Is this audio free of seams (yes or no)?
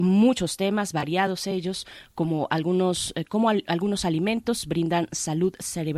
yes